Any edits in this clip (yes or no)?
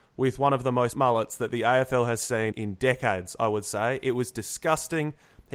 yes